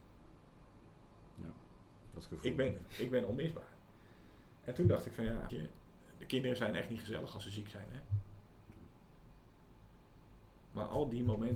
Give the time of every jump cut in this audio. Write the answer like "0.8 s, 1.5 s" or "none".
5.5 s